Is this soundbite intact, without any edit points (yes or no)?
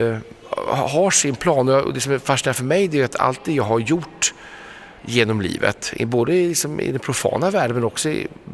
no